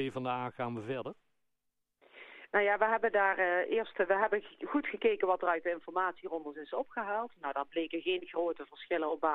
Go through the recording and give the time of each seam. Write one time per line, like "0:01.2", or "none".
none